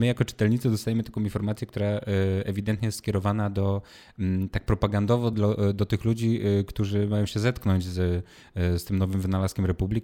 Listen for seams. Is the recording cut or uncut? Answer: uncut